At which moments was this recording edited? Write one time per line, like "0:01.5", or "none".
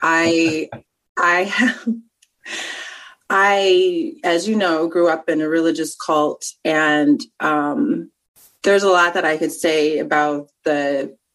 none